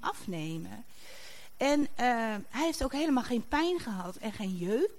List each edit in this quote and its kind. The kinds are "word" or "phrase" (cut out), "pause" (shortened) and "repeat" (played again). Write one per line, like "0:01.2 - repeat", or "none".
none